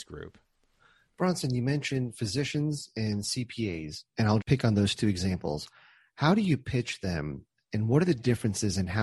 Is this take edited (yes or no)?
yes